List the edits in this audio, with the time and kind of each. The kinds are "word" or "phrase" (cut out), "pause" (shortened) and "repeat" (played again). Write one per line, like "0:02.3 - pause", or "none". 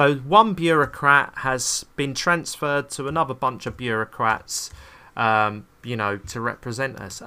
0:06.2 - word